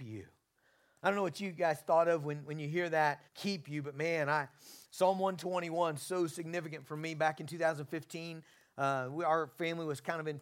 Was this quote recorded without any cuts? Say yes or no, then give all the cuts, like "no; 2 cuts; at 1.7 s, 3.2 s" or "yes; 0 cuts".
no; 2 cuts; at 3.3 s, 4.8 s